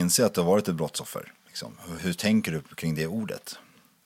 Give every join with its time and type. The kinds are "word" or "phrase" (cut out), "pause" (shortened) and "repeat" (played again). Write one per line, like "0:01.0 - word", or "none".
0:02.0 - word